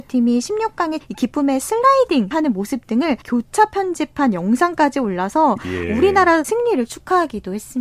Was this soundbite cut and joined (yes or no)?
yes